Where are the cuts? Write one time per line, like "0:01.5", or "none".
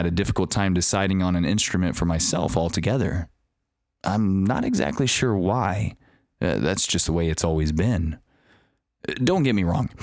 none